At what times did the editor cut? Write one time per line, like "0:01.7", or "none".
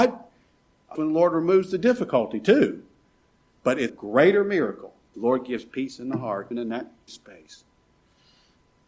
0:01.0
0:03.9
0:05.1
0:06.5
0:07.1